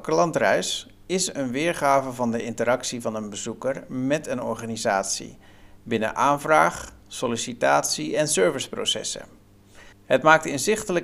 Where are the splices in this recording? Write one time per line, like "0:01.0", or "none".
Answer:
0:09.9